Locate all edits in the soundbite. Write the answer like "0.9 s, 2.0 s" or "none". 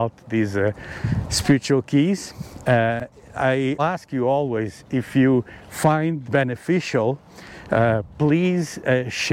3.8 s, 6.3 s

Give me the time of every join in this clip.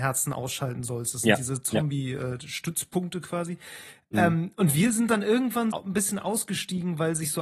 5.7 s

